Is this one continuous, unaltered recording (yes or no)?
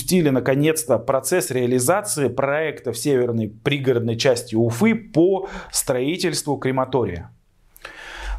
yes